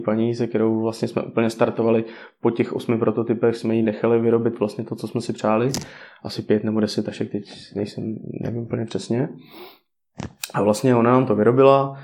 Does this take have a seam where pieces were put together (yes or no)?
no